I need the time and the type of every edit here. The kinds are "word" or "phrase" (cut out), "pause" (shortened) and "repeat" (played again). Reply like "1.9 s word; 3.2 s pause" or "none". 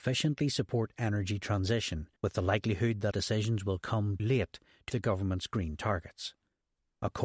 2.2 s pause; 3.1 s word; 4.2 s word; 4.9 s word